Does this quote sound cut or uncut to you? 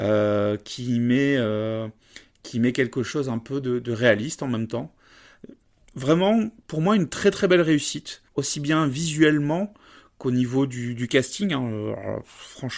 cut